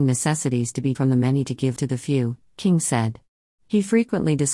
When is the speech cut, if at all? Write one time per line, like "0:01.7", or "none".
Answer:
0:00.9
0:01.8
0:03.5